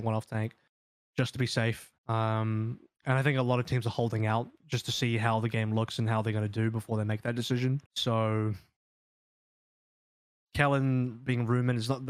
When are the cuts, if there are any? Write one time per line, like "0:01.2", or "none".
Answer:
0:02.0
0:07.9